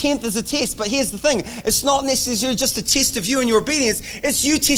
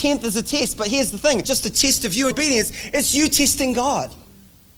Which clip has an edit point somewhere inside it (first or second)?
second